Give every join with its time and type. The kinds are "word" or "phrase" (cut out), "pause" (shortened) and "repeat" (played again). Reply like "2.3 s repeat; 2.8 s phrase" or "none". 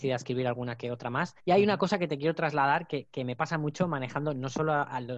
1.4 s pause